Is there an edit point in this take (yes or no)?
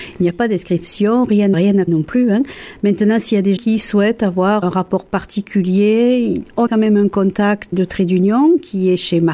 yes